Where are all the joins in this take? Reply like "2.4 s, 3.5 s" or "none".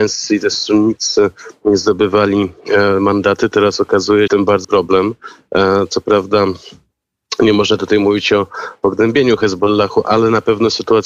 4.3 s, 4.6 s